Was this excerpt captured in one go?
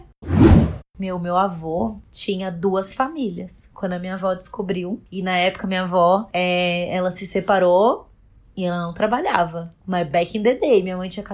yes; 0 cuts

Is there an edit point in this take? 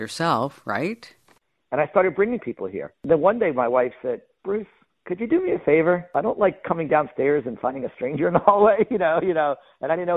no; 0 cuts

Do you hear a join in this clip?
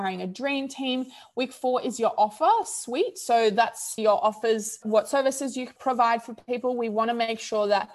yes; 2 cuts; at 4.0 s, 4.8 s

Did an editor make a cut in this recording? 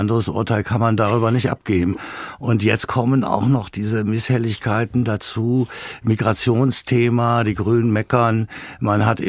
no; 0 cuts

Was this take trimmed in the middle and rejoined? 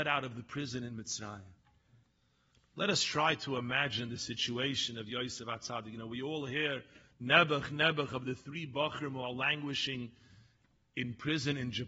no; 0 cuts

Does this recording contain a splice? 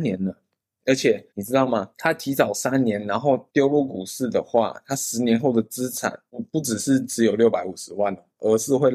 yes; 3 cuts; at 1.3 s, 1.9 s, 3.5 s

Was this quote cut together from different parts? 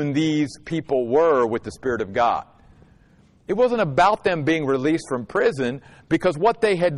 no; 0 cuts

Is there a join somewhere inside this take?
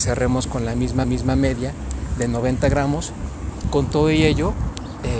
yes; 2 cuts; at 1.0 s, 3.6 s

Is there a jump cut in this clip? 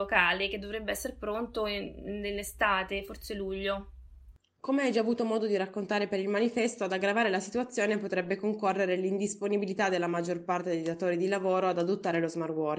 no; 0 cuts

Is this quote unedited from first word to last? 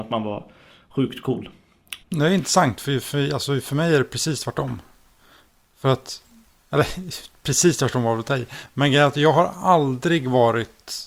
no; 1 cut; at 2.0 s

